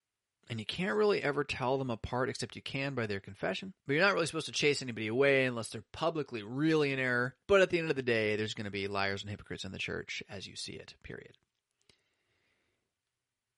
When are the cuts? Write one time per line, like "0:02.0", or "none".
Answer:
0:03.8
0:07.4